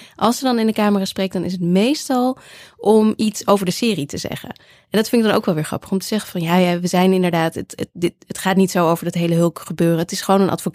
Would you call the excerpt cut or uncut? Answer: uncut